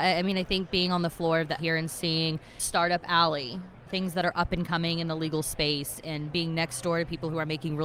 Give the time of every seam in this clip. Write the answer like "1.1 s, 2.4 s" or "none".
1.6 s